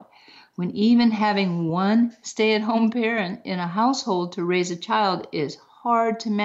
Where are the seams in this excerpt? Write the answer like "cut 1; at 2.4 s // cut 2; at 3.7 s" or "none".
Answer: none